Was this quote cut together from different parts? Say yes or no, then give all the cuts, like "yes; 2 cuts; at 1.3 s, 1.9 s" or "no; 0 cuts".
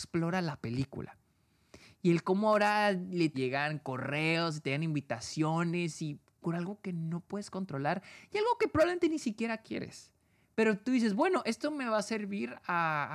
yes; 1 cut; at 3.3 s